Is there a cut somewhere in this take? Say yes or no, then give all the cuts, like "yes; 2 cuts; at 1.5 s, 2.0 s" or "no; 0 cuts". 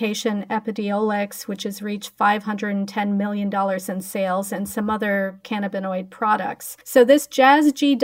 yes; 1 cut; at 6.8 s